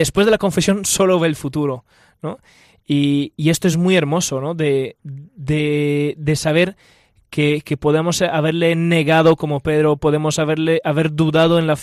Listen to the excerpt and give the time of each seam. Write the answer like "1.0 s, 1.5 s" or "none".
none